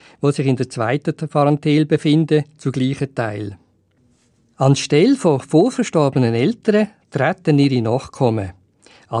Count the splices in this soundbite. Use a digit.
0